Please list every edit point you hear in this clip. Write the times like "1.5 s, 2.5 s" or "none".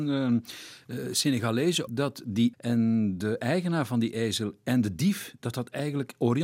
1.9 s, 2.5 s